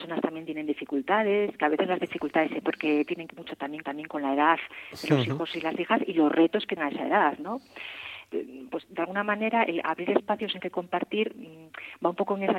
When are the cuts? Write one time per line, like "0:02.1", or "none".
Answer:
0:02.6
0:03.3
0:03.8
0:06.8
0:10.6